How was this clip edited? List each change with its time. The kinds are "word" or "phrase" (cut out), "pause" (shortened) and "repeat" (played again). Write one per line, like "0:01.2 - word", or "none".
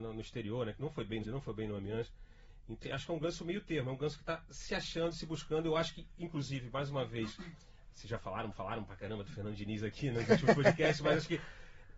0:01.2 - word
0:02.8 - word
0:08.5 - repeat